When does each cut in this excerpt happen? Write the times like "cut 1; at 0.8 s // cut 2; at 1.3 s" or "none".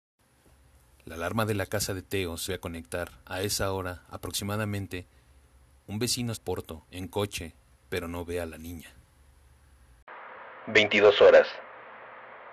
cut 1; at 2.5 s // cut 2; at 3.2 s // cut 3; at 6.3 s // cut 4; at 6.9 s